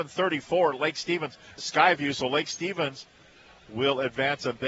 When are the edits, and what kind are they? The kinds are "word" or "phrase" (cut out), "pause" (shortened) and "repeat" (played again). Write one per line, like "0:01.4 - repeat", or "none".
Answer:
0:01.6 - word